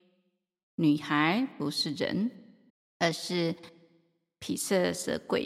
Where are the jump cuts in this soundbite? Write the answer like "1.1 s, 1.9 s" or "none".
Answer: 2.7 s

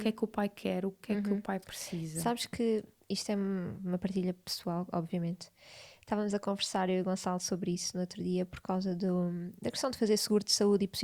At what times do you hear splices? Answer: none

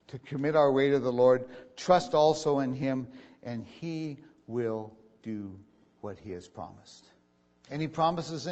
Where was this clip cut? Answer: none

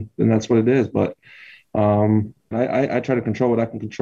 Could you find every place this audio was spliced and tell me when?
2.5 s

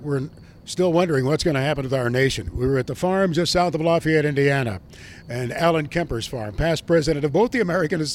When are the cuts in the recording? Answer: none

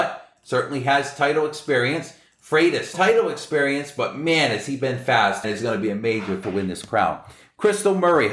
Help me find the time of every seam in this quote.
2.9 s, 5.4 s, 6.4 s

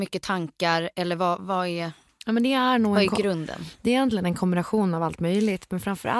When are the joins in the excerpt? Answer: 1.4 s

